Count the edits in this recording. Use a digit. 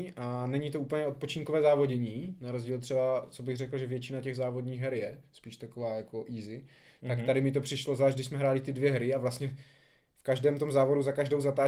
0